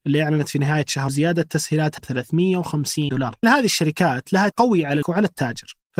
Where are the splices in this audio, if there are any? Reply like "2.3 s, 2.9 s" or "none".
1.1 s, 2.0 s, 3.1 s, 3.4 s, 4.5 s, 5.0 s